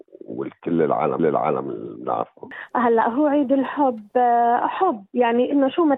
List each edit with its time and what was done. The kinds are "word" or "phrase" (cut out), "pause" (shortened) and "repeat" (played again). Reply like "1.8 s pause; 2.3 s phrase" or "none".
1.2 s repeat